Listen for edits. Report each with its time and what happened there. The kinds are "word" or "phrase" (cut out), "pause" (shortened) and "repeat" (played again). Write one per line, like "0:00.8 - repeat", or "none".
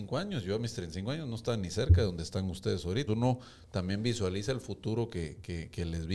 0:03.1 - word